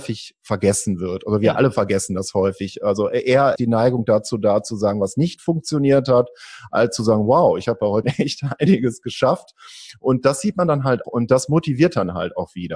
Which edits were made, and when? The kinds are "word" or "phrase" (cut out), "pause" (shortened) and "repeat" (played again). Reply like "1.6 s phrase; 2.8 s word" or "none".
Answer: 3.6 s word; 8.0 s word; 11.0 s word